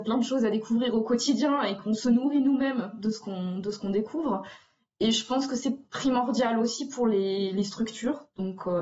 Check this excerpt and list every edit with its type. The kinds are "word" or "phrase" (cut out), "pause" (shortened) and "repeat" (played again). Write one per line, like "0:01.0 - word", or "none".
none